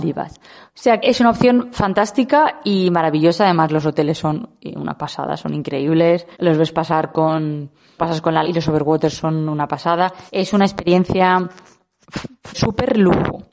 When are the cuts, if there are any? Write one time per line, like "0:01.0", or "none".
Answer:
0:01.0
0:06.3
0:08.0
0:08.4
0:10.3
0:12.5